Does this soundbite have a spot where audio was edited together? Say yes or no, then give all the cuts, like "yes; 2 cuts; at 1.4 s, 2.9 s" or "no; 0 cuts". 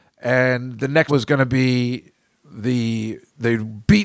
yes; 1 cut; at 1.1 s